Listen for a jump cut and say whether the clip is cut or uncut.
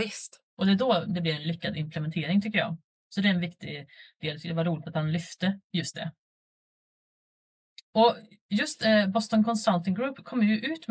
uncut